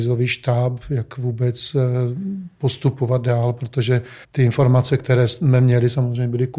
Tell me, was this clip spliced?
yes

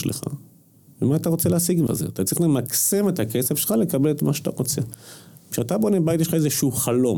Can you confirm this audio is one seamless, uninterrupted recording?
no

